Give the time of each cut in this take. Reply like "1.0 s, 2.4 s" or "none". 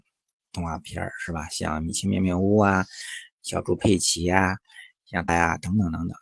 5.3 s